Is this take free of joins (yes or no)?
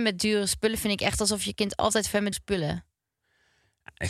no